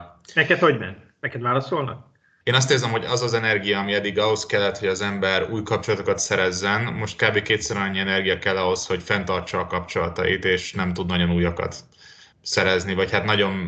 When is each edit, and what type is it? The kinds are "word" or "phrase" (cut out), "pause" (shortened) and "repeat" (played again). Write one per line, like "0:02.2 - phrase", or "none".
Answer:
none